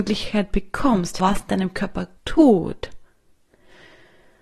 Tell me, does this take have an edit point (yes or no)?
yes